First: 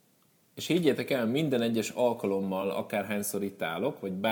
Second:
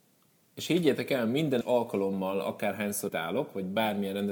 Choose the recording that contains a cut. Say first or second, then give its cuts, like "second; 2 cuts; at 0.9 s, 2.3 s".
second; 2 cuts; at 1.6 s, 3.1 s